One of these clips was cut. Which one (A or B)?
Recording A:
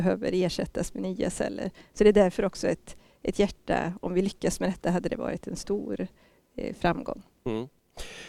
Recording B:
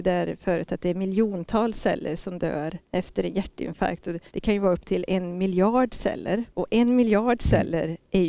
B